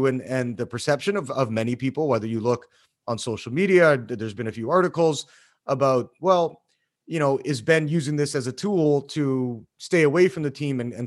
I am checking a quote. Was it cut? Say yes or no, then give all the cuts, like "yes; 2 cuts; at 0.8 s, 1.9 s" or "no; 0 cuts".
no; 0 cuts